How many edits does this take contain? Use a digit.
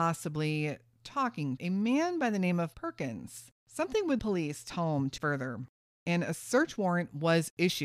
6